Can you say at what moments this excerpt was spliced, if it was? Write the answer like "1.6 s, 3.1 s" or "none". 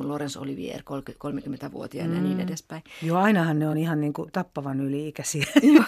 none